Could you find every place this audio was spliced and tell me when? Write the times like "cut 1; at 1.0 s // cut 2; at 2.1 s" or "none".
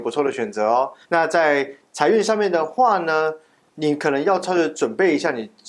cut 1; at 1.0 s